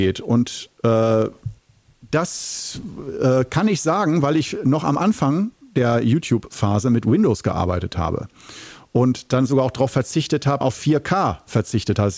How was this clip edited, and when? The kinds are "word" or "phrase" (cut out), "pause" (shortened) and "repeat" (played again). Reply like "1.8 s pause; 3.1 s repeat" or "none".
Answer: 10.6 s word